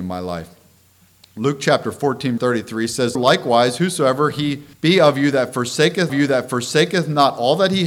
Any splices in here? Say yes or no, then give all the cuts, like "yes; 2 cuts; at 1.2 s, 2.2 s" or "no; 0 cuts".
yes; 4 cuts; at 2.4 s, 3.1 s, 4.7 s, 6.1 s